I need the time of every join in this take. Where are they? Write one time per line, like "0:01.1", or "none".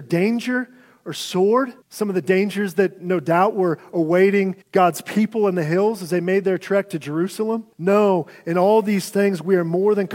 0:01.8
0:04.6
0:07.7